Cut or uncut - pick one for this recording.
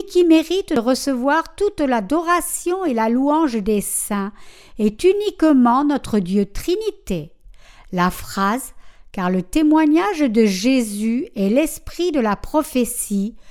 uncut